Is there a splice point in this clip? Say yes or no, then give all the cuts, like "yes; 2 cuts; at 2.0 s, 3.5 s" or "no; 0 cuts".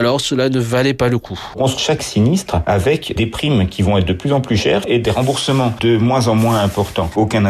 yes; 1 cut; at 1.8 s